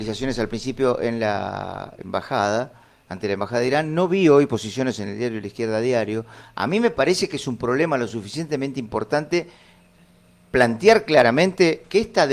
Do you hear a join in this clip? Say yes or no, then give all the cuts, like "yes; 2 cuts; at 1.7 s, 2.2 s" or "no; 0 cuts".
no; 0 cuts